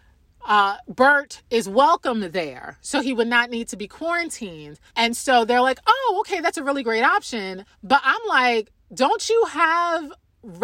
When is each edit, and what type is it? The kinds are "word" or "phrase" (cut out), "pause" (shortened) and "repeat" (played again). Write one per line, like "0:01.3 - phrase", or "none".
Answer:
0:04.9 - pause
0:07.7 - pause

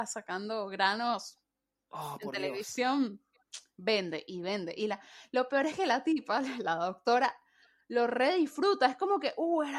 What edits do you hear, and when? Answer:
none

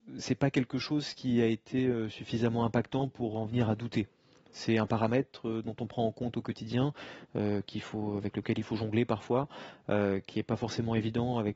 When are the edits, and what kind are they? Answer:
none

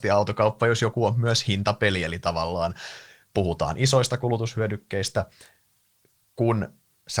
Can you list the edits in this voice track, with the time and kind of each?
none

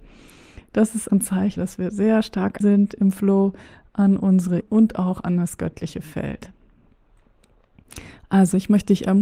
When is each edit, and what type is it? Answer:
0:01.1 - word
0:01.6 - word
0:02.6 - word
0:04.6 - word

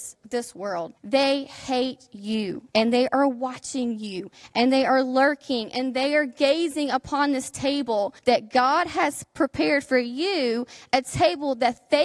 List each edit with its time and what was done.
0:01.0 - pause
0:02.7 - pause
0:08.2 - pause

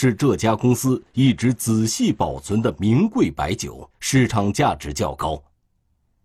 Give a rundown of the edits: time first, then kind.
0:03.9 - pause

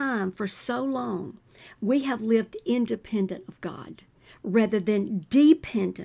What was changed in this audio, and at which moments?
none

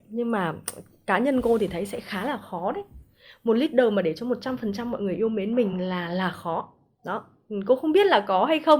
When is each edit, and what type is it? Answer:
none

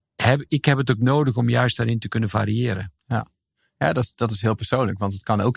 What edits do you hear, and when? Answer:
none

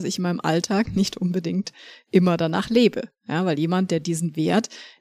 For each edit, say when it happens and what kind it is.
none

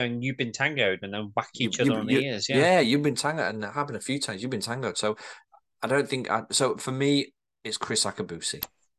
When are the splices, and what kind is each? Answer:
none

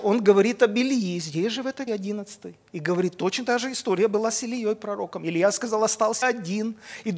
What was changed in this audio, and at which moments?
0:01.9 - word
0:06.2 - word

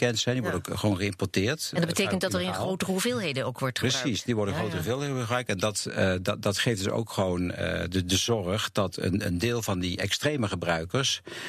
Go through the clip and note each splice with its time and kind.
none

